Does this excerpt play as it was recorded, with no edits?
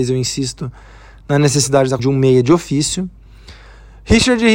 no; 1 cut; at 2.0 s

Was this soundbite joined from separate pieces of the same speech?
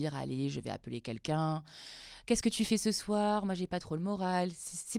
no; 0 cuts

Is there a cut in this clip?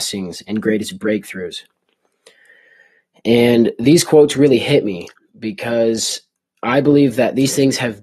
no; 0 cuts

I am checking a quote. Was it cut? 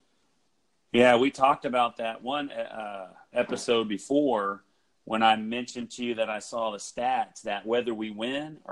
no; 0 cuts

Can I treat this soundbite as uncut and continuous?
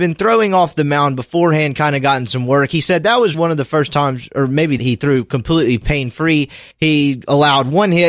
no; 3 cuts; at 3.3 s, 4.8 s, 6.7 s

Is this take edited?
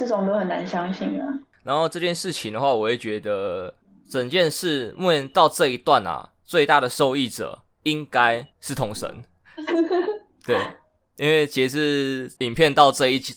yes; 3 cuts; at 7.7 s, 8.5 s, 12.4 s

